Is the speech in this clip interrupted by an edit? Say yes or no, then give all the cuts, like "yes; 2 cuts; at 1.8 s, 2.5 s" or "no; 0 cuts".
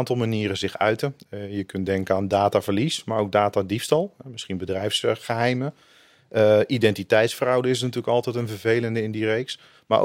no; 0 cuts